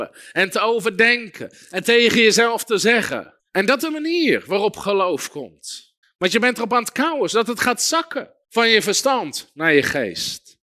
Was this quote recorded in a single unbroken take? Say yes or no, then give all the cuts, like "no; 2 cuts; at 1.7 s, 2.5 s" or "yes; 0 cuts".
no; 4 cuts; at 3.4 s, 3.8 s, 6.0 s, 8.4 s